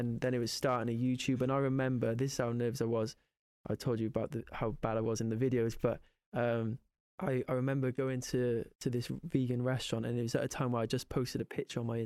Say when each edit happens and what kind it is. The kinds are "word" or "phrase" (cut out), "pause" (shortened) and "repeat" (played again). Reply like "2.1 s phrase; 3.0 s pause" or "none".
8.7 s pause